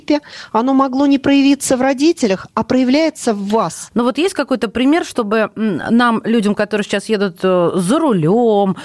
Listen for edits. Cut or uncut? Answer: uncut